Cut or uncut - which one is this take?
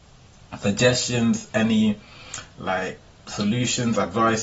uncut